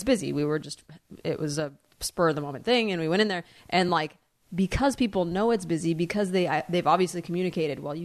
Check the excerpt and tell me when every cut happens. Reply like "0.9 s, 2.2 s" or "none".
none